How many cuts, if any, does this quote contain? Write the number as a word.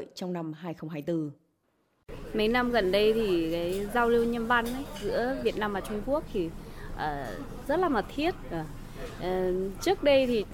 zero